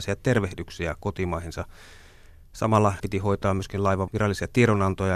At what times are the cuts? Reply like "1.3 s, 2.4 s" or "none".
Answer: 3.0 s

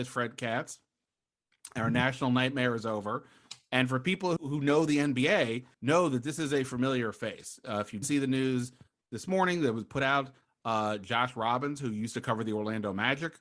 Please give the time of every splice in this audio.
4.4 s, 5.7 s, 8.0 s

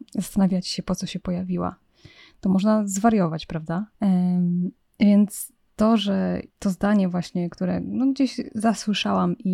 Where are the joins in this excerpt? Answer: 3.9 s, 5.7 s, 6.5 s

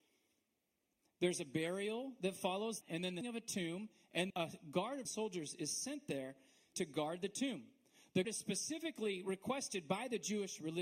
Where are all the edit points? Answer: 2.8 s, 3.2 s, 4.3 s, 5.1 s, 6.7 s, 8.2 s

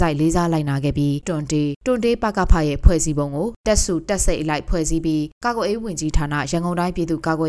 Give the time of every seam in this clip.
1.2 s

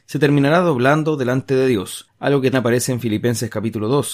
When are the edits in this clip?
2.5 s

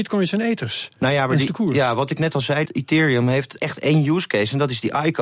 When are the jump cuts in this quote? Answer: 1.5 s, 2.7 s, 3.6 s

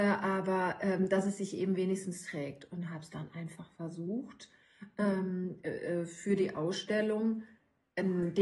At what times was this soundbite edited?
none

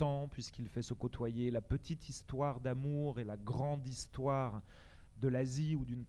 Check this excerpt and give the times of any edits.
none

